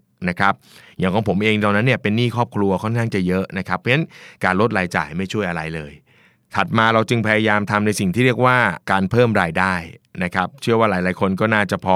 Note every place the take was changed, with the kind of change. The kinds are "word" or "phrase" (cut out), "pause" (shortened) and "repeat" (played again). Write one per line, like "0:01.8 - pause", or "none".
0:08.8 - pause